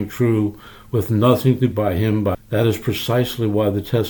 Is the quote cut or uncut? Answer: cut